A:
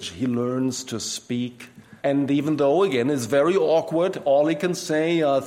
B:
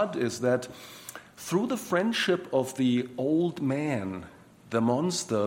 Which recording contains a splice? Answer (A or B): A